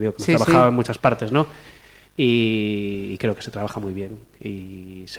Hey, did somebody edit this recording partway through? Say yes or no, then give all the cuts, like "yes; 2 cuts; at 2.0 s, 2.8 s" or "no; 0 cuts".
no; 0 cuts